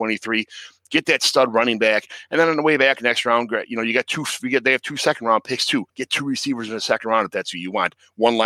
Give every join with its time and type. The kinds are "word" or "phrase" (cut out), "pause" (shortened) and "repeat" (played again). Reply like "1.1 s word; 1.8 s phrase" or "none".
5.9 s pause